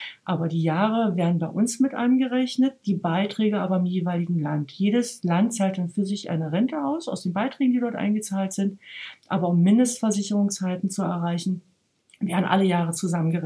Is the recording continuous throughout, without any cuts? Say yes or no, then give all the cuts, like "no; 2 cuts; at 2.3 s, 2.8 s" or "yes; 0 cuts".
yes; 0 cuts